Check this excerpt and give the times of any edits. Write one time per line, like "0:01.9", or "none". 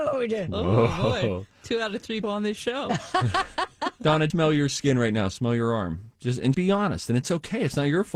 0:02.2
0:04.3
0:06.5